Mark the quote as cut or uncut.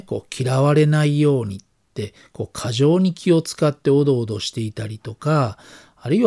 uncut